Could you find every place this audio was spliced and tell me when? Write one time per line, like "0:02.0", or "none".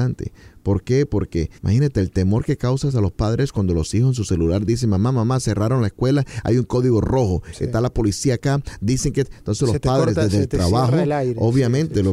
0:01.6